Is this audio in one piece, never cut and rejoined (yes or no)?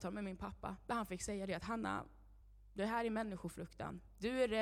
yes